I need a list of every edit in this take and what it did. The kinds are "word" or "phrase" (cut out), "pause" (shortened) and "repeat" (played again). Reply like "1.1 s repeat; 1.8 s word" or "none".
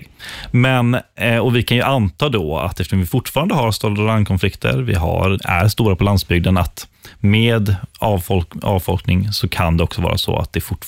5.4 s word